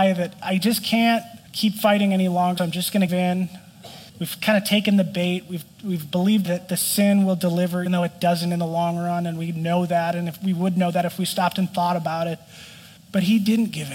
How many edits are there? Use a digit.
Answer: 7